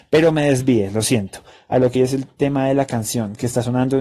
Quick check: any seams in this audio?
yes; 1 cut; at 1.9 s

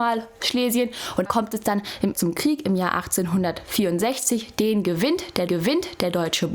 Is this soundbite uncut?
no; 3 cuts; at 1.3 s, 2.1 s, 5.5 s

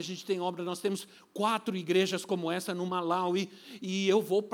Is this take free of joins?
yes; 0 cuts

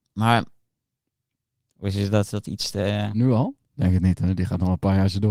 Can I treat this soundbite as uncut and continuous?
no; 2 cuts; at 2.3 s, 3.6 s

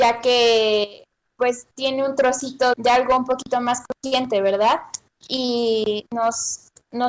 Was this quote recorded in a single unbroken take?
no; 1 cut; at 2.7 s

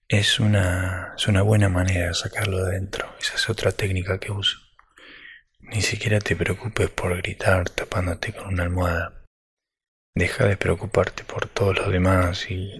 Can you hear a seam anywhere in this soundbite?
no; 0 cuts

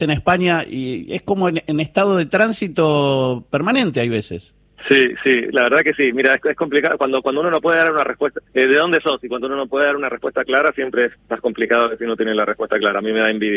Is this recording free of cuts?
no; 2 cuts; at 8.5 s, 11.2 s

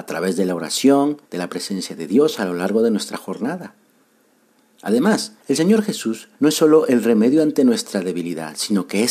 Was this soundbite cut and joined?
yes; 3 cuts; at 1.3 s, 5.4 s, 6.3 s

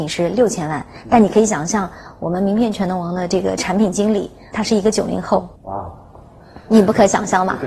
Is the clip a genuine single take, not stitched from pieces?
no; 2 cuts; at 4.5 s, 5.6 s

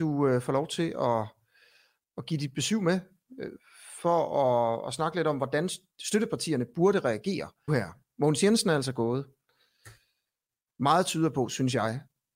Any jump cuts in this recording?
yes; 1 cut; at 7.7 s

